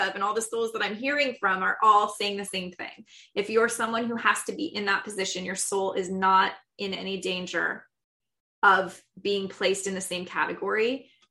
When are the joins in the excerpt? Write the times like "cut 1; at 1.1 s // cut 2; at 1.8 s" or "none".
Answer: none